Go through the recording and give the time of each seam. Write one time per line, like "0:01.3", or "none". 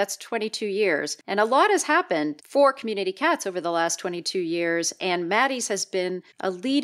0:01.2